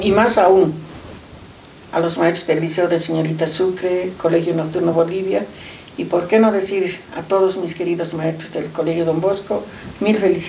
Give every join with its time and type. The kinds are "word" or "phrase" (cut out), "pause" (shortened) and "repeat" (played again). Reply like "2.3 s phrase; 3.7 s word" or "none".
none